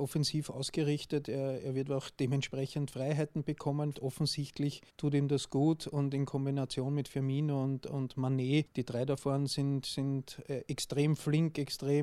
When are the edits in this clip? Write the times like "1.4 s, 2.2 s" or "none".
3.9 s, 4.9 s